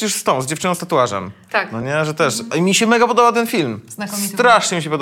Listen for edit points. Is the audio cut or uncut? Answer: uncut